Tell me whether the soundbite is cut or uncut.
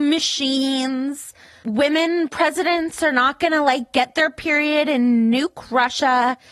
uncut